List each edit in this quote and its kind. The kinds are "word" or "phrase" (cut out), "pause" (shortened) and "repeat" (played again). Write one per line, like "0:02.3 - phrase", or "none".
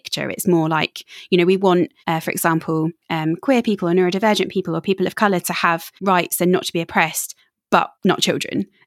0:02.0 - pause
0:03.0 - pause
0:06.0 - pause
0:07.9 - pause